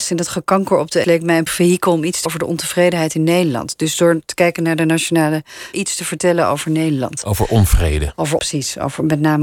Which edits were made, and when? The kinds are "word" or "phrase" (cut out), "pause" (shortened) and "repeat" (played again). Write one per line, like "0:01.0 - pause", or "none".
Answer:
0:01.0 - word
0:01.5 - word
0:02.3 - word
0:05.7 - word
0:08.4 - word